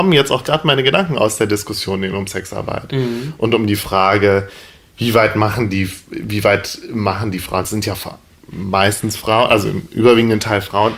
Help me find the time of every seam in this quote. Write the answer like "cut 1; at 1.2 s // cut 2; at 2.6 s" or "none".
none